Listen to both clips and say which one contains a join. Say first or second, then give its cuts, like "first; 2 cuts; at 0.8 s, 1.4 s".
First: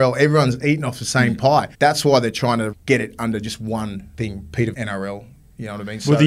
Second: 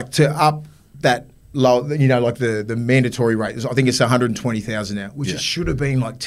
first; 4 cuts; at 1.7 s, 2.7 s, 4.1 s, 4.7 s